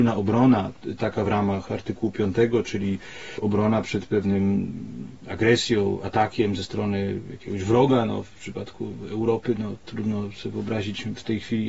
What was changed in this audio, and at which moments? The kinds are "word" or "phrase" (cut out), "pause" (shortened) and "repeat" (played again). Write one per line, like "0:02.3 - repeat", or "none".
none